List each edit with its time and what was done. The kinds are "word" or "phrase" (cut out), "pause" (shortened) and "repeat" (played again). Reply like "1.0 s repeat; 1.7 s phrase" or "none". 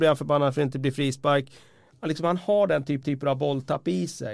3.0 s repeat